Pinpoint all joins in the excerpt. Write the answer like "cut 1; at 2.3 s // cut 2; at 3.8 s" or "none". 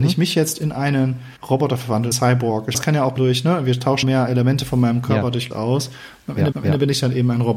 cut 1; at 1.4 s // cut 2; at 2.1 s // cut 3; at 2.7 s // cut 4; at 3.2 s // cut 5; at 4.0 s // cut 6; at 5.5 s // cut 7; at 6.5 s

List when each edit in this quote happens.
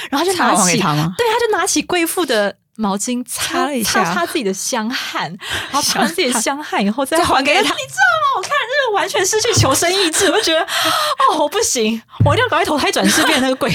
cut 1; at 7.7 s

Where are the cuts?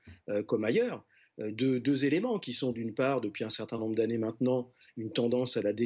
none

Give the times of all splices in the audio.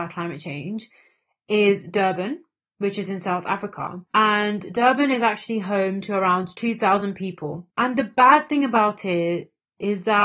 none

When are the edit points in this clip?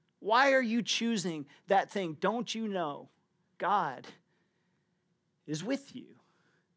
none

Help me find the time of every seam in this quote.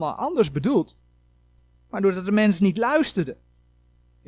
none

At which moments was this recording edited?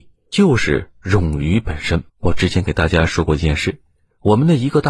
cut 1; at 2.1 s

